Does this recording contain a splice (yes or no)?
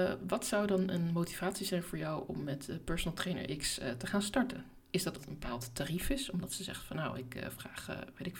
yes